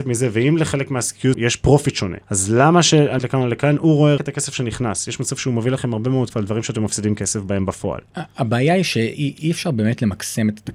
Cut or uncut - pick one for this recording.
cut